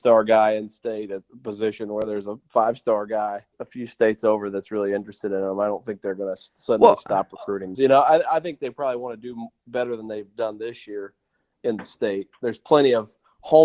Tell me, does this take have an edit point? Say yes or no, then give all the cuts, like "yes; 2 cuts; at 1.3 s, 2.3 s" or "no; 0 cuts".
yes; 2 cuts; at 3.5 s, 7.7 s